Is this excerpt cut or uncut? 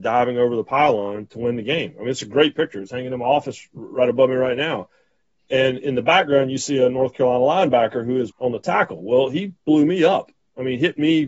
cut